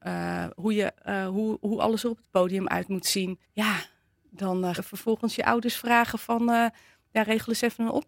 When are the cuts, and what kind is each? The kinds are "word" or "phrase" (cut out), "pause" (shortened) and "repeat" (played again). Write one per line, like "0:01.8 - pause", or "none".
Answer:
0:03.4 - pause
0:04.8 - phrase

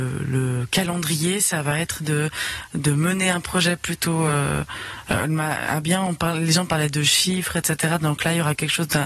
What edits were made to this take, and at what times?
none

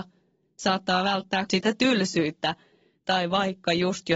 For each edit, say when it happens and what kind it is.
0:01.5 - phrase

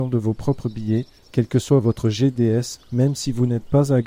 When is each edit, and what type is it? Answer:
0:02.8 - pause

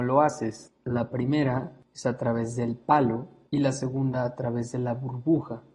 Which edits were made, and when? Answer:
0:03.5 - pause

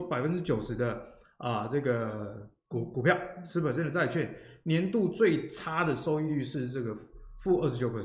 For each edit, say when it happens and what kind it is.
none

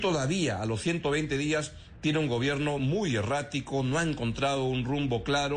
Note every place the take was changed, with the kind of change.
none

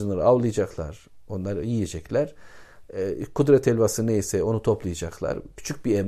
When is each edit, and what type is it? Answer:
none

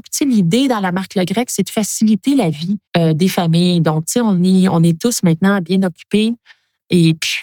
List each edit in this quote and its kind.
0:02.9 - pause

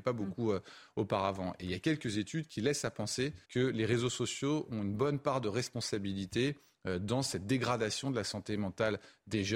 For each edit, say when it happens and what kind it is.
0:03.4 - pause

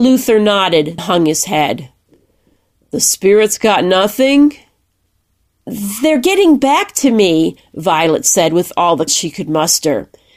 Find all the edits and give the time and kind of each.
0:01.0 - word
0:09.1 - word

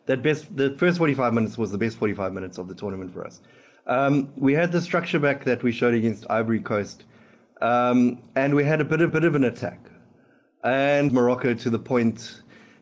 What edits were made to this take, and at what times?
0:09.1 - repeat
0:11.1 - phrase

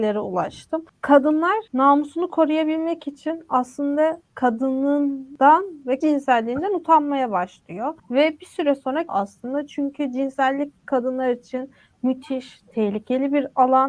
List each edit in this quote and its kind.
0:01.7 - pause
0:06.0 - word
0:08.0 - pause
0:09.1 - phrase

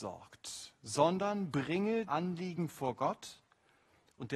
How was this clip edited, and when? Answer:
0:02.1 - word

